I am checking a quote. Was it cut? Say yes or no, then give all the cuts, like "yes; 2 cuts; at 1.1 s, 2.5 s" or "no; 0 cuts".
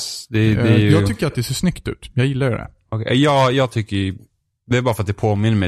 no; 0 cuts